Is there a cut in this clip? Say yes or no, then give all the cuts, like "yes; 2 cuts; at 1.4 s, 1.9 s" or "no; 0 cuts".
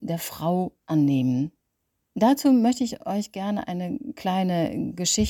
no; 0 cuts